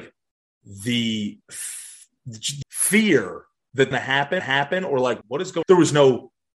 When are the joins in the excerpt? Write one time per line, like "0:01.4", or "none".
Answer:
0:01.4
0:02.6
0:03.9
0:04.4
0:05.2
0:05.6